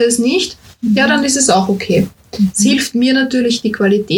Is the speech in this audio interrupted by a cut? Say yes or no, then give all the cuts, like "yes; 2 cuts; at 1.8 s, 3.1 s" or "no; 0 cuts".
no; 0 cuts